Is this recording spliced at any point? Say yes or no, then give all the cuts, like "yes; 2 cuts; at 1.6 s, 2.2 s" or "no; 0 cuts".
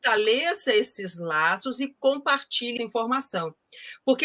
yes; 1 cut; at 2.8 s